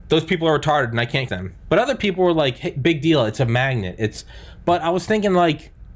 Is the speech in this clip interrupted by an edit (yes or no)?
yes